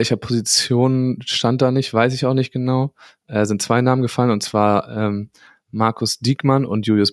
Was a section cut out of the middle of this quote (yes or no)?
no